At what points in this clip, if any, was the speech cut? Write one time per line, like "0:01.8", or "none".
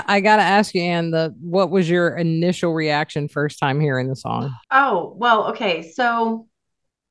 0:04.6